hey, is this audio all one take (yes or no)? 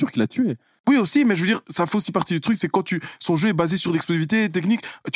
yes